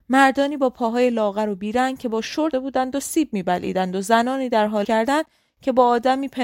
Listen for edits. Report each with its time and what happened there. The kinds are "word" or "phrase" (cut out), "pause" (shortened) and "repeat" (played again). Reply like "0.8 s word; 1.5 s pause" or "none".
2.5 s word; 4.8 s word